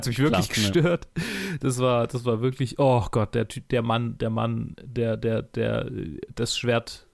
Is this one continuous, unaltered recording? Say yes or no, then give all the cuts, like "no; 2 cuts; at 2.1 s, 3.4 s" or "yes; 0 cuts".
yes; 0 cuts